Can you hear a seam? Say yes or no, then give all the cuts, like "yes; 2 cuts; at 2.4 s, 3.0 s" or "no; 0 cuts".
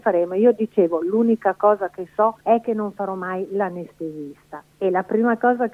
yes; 2 cuts; at 2.4 s, 4.7 s